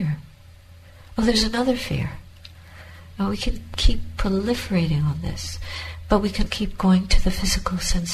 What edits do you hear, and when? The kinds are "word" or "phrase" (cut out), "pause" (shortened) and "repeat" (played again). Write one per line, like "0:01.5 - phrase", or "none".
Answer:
0:06.5 - word